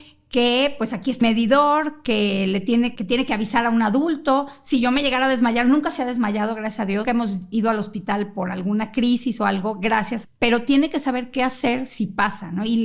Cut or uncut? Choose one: cut